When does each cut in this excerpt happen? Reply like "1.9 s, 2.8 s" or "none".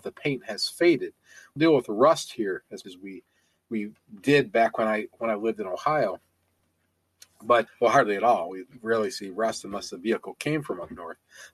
1.6 s, 2.8 s, 7.7 s